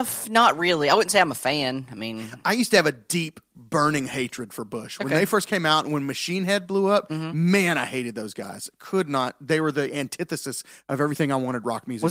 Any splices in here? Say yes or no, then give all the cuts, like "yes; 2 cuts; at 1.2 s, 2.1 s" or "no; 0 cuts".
no; 0 cuts